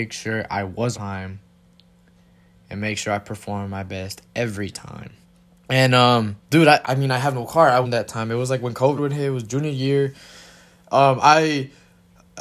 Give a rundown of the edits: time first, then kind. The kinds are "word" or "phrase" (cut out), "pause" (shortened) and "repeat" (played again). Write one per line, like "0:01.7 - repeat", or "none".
0:00.9 - word
0:05.2 - pause
0:06.4 - pause
0:06.8 - word
0:07.8 - phrase
0:09.0 - phrase

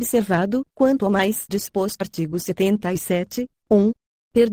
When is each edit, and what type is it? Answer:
0:01.5 - word
0:02.0 - word

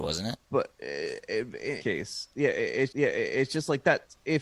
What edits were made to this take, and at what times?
0:01.8 - word
0:02.9 - repeat

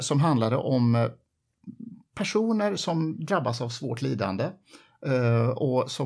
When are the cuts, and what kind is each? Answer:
none

